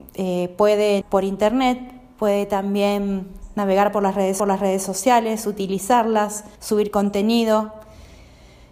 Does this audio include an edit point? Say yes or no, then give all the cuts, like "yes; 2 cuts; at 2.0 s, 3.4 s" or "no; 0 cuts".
yes; 3 cuts; at 1.0 s, 4.4 s, 6.6 s